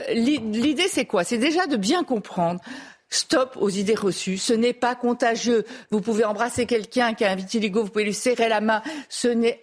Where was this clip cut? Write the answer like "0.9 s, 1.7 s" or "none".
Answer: none